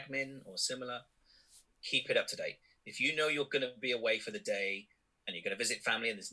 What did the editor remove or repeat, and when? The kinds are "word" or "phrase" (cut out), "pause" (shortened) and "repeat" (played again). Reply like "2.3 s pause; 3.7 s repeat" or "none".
none

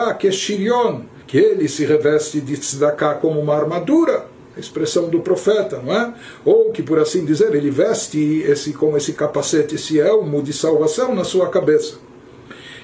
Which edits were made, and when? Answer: 1.2 s pause

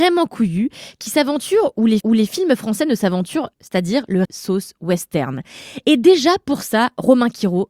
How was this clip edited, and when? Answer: 2.0 s repeat; 3.5 s word; 4.2 s phrase

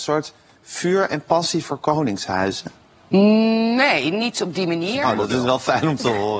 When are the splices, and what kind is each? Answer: none

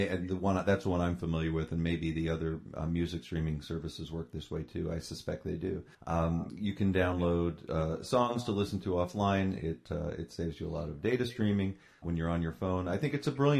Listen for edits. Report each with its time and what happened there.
5.9 s pause; 12.0 s word

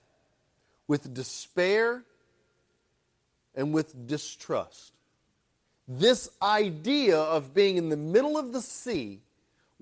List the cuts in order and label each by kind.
none

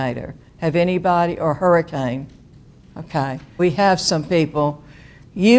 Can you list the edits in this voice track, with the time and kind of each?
3.6 s word

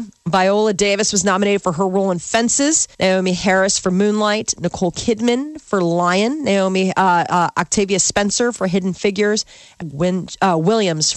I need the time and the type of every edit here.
2.9 s pause; 9.8 s word

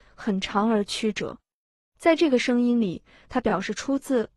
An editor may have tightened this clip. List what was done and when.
none

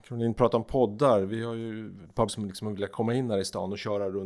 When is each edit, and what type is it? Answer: 2.3 s word

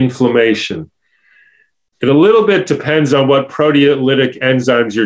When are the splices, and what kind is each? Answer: none

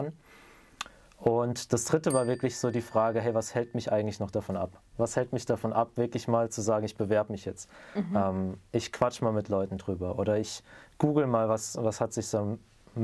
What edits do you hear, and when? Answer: none

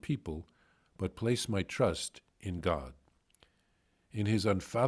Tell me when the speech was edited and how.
none

